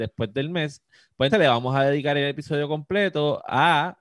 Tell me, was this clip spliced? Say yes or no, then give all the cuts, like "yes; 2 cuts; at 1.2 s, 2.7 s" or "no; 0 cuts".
yes; 1 cut; at 1.3 s